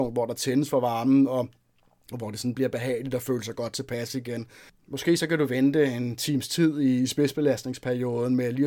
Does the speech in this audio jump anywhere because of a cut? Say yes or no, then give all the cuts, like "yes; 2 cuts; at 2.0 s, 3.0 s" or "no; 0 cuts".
no; 0 cuts